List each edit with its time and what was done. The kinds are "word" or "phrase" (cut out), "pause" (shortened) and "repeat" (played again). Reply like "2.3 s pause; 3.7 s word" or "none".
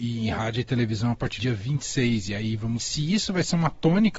1.4 s word; 2.8 s word